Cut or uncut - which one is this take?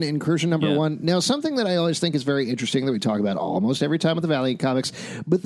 uncut